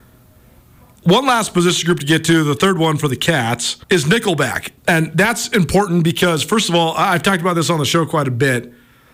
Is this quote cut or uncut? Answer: cut